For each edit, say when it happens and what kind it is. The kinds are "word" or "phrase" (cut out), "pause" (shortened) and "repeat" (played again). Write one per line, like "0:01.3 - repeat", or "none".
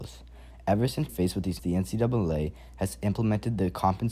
0:01.1 - word
0:01.6 - word